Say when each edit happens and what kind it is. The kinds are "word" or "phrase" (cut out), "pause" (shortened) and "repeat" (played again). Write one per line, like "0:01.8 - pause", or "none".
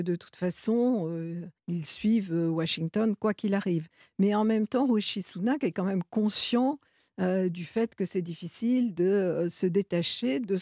0:01.6 - pause